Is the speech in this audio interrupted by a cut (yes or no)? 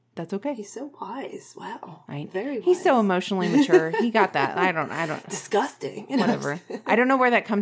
no